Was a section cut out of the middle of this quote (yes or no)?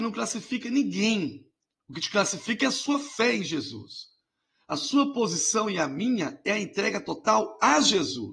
no